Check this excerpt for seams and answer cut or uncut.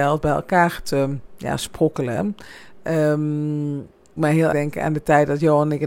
cut